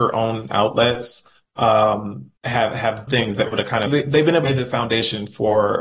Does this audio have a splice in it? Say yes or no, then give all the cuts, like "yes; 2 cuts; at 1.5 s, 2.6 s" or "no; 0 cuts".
yes; 5 cuts; at 2.4 s, 3.1 s, 3.5 s, 3.9 s, 4.5 s